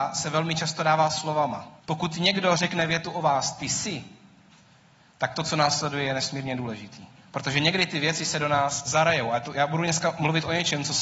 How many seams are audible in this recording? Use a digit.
2